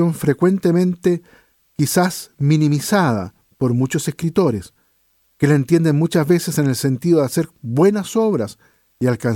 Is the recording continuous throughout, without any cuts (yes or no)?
yes